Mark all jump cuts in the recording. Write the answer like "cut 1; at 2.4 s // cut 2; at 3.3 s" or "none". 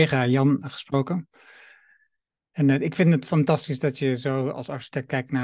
none